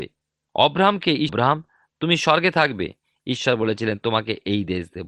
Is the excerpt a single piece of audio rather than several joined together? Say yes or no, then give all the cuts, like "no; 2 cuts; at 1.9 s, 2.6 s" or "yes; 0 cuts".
no; 1 cut; at 1.3 s